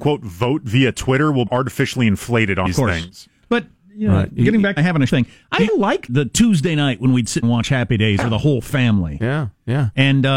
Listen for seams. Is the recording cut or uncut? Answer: cut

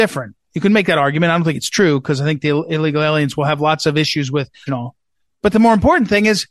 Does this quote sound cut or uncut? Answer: cut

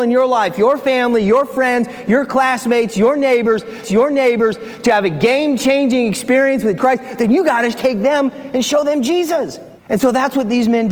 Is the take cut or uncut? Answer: cut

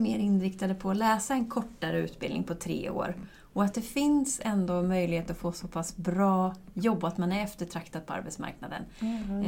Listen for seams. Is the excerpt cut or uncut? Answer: uncut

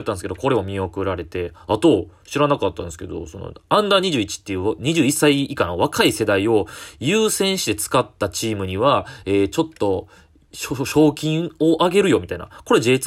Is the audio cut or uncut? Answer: uncut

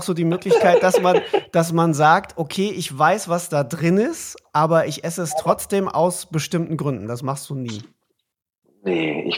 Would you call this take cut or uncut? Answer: uncut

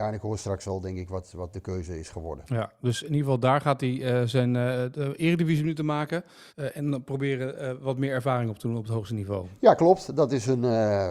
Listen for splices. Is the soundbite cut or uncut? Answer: cut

